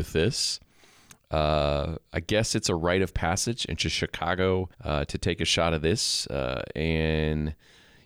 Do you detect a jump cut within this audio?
yes; 1 cut; at 4.7 s

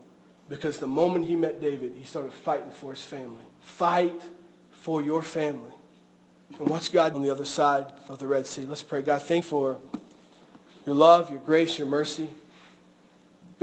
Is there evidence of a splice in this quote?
yes; 3 cuts; at 3.5 s, 7.1 s, 9.4 s

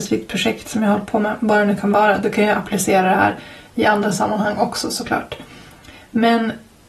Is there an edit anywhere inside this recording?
no; 0 cuts

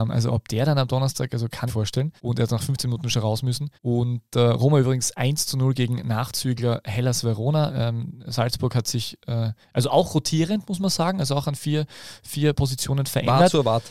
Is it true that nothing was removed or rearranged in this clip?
no; 3 cuts; at 1.7 s, 2.2 s, 3.7 s

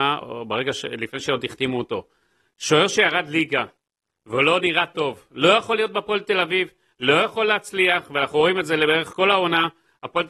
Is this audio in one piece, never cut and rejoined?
yes; 0 cuts

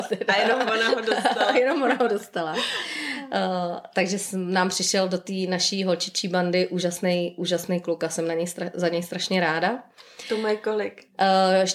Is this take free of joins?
yes; 0 cuts

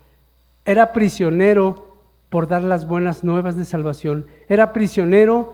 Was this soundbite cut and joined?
no; 0 cuts

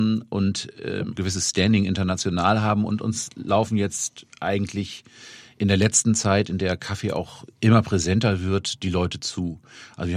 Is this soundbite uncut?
no; 1 cut; at 1.1 s

